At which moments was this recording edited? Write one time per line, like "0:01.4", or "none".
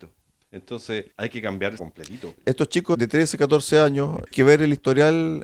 0:01.1
0:01.8
0:02.9
0:04.3